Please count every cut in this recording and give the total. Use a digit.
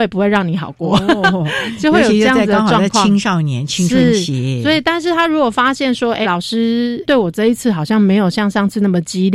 1